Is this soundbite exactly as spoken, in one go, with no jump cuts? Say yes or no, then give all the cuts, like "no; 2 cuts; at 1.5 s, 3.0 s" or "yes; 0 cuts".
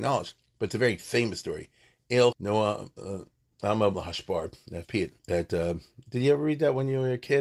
no; 4 cuts; at 2.3 s, 3.9 s, 4.8 s, 5.2 s